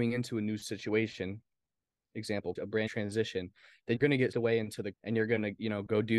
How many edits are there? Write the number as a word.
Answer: five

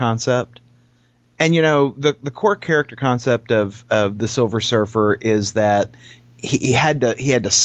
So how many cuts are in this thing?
zero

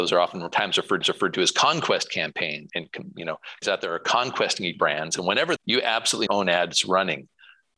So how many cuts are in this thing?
six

